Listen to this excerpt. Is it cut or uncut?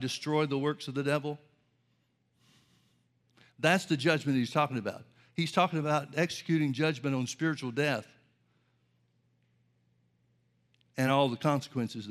uncut